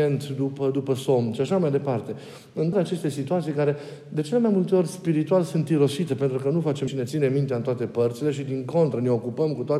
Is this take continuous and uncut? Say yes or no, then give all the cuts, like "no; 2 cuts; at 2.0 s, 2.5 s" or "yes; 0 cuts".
no; 2 cuts; at 2.7 s, 6.9 s